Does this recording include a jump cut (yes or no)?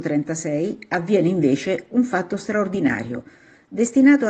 no